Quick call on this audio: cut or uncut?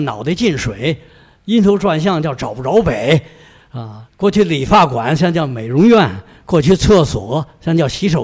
cut